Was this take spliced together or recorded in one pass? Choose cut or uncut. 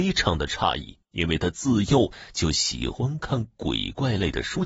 cut